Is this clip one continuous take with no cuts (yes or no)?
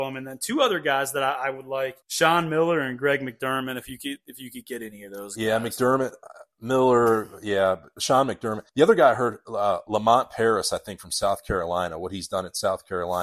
no